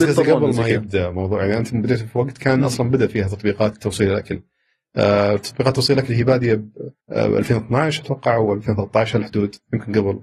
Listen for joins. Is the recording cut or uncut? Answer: cut